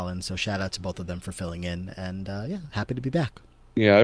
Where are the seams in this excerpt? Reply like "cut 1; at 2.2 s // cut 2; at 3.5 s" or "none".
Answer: none